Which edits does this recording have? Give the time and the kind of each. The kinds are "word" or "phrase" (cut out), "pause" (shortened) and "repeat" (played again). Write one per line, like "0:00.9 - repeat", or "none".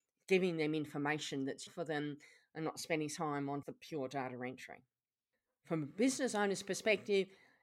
0:01.7 - word
0:03.2 - word
0:03.6 - word